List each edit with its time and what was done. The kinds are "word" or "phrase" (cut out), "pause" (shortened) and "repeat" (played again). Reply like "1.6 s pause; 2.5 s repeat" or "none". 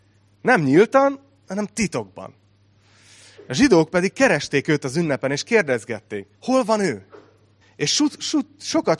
6.3 s pause; 7.6 s pause